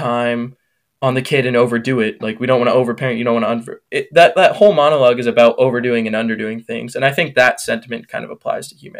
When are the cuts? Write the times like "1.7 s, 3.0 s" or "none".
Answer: none